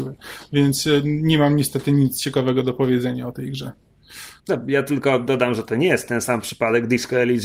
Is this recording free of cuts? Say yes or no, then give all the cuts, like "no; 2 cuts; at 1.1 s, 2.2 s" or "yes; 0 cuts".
no; 1 cut; at 4.4 s